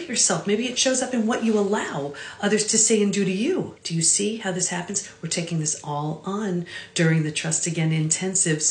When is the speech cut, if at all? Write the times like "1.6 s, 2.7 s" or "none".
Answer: 3.8 s